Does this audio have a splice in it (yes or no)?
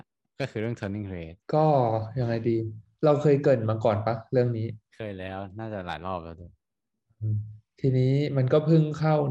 yes